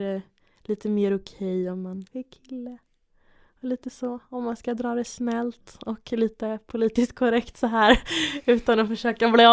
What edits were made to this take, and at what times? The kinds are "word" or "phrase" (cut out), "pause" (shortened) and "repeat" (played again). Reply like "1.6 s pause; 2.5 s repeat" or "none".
2.1 s word